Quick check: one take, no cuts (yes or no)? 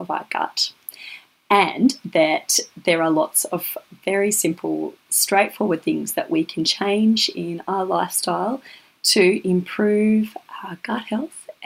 yes